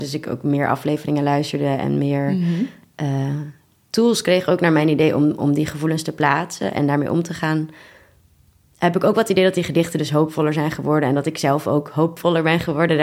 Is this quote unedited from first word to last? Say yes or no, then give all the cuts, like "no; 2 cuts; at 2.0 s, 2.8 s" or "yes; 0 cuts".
yes; 0 cuts